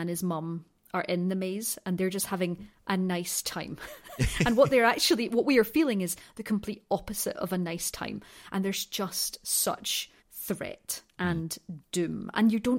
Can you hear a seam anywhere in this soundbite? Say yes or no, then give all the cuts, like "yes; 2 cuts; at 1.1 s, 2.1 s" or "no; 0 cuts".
yes; 1 cut; at 10.2 s